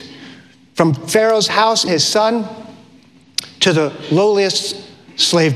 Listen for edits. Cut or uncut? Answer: cut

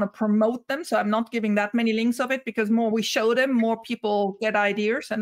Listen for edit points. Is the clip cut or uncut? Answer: uncut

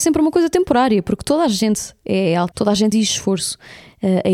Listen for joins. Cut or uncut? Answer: cut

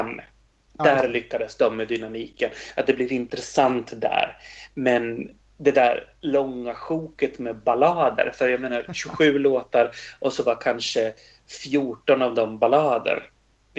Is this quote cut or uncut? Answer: uncut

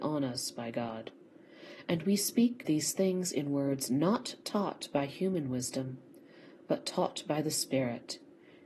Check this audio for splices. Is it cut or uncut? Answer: cut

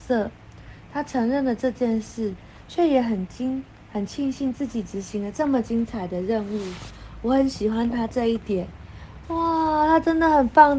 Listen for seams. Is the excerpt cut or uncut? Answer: uncut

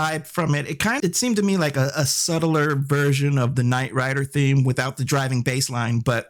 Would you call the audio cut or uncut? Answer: cut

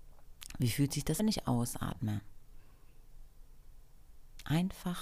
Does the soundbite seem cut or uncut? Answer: cut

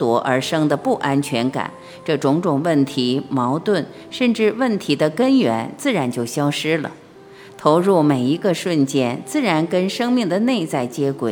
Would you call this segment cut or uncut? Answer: uncut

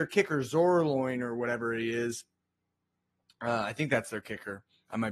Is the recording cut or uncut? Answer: uncut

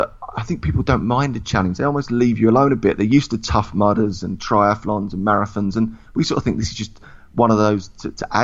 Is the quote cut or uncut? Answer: uncut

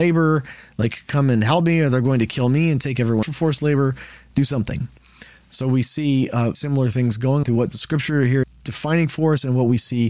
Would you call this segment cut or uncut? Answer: cut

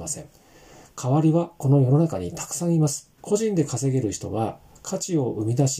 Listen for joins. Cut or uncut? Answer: cut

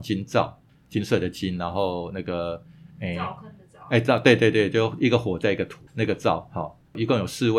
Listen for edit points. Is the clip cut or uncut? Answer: uncut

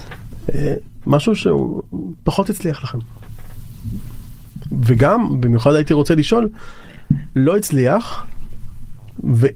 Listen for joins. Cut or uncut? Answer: uncut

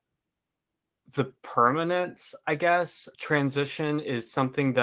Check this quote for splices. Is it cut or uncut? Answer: cut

